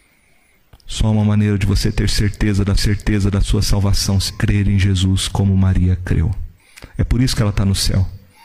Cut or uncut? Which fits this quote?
cut